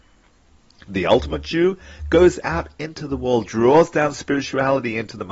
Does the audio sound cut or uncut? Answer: uncut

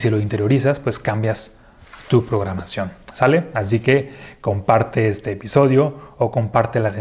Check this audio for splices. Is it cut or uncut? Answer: uncut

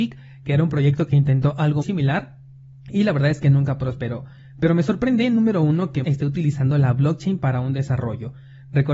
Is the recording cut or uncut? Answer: cut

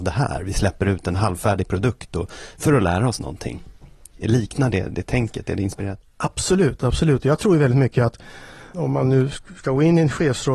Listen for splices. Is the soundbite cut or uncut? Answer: uncut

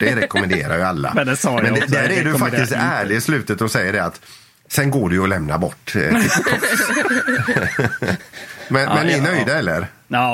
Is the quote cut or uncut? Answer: uncut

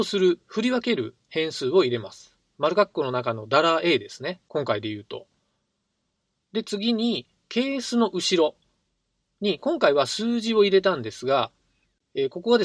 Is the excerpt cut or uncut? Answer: uncut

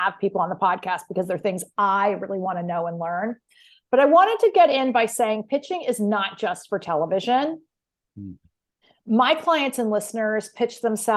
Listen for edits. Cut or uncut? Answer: uncut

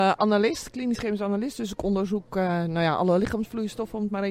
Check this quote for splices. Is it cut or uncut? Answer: uncut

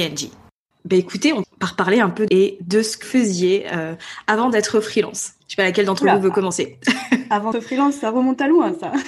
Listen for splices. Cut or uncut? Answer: cut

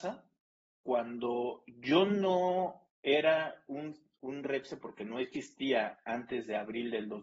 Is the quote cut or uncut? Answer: uncut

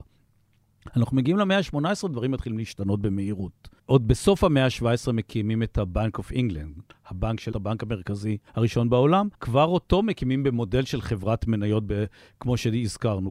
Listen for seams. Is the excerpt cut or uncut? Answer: cut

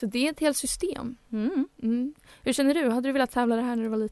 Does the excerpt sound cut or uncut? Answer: uncut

